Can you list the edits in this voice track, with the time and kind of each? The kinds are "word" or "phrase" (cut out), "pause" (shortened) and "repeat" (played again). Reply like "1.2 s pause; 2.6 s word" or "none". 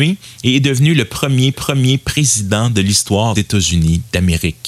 1.5 s repeat; 3.4 s word